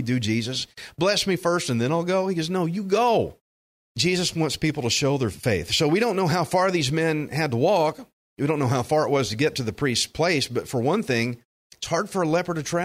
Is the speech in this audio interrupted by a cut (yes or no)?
no